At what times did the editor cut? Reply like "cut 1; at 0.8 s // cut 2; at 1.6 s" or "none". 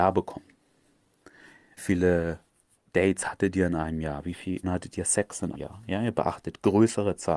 cut 1; at 1.8 s // cut 2; at 4.6 s // cut 3; at 5.5 s

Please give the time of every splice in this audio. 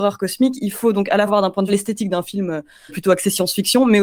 cut 1; at 1.3 s // cut 2; at 1.7 s // cut 3; at 2.9 s

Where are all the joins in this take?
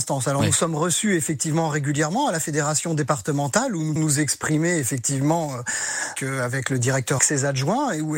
cut 1; at 4.0 s // cut 2; at 6.2 s // cut 3; at 7.2 s

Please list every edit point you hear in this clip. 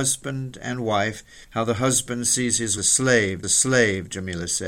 cut 1; at 1.4 s // cut 2; at 2.8 s // cut 3; at 3.4 s

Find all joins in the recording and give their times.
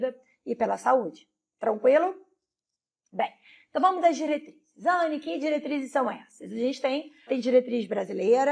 cut 1; at 7.3 s

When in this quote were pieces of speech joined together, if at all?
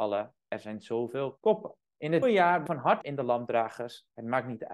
cut 1; at 1.4 s // cut 2; at 1.8 s // cut 3; at 2.2 s // cut 4; at 2.7 s // cut 5; at 3.0 s

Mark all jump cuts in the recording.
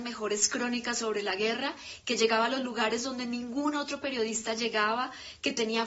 none

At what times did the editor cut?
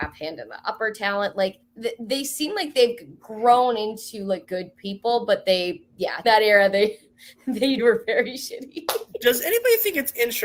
cut 1; at 1.6 s // cut 2; at 4.4 s // cut 3; at 6.2 s // cut 4; at 7.8 s

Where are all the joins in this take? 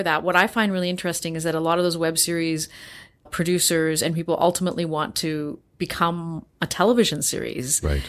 cut 1; at 3.3 s

